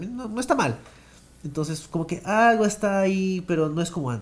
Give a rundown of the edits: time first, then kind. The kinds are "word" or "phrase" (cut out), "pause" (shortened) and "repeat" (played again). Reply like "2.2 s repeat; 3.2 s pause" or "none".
none

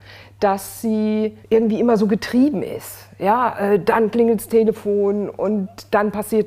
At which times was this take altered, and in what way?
1.4 s pause

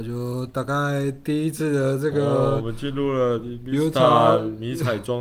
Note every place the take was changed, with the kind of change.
none

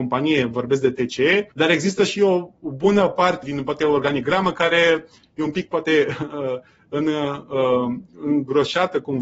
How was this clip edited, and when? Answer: 1.5 s pause; 3.4 s word

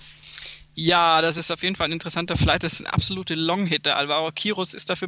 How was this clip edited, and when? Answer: none

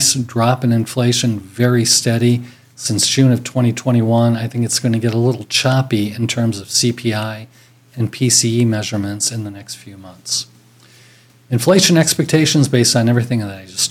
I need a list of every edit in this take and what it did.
none

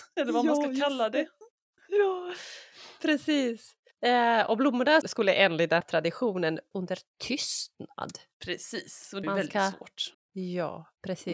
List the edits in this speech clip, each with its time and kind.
3.9 s pause; 5.0 s word; 5.8 s word; 6.7 s word; 9.2 s phrase; 10.1 s pause

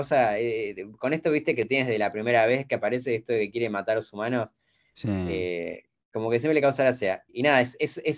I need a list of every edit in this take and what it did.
none

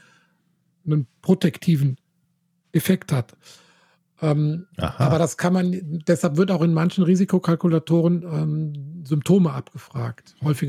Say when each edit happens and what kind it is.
none

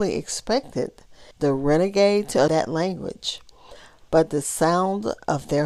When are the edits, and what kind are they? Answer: 1.3 s pause; 2.5 s phrase

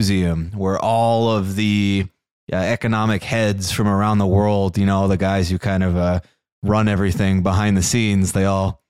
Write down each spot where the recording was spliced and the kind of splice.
none

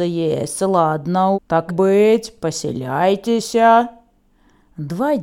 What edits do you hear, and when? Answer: 1.3 s word; 1.7 s word

